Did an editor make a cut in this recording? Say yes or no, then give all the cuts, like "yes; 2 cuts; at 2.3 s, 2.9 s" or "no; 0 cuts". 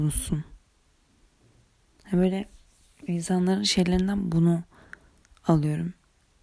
no; 0 cuts